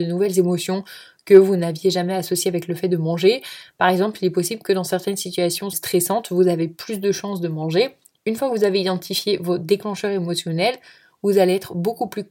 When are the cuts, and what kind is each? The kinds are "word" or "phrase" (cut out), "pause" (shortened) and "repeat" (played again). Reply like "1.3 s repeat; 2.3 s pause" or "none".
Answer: 5.7 s word